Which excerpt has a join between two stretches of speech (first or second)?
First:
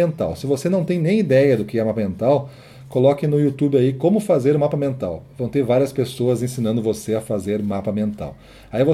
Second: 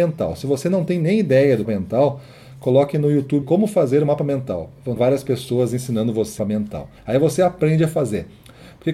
second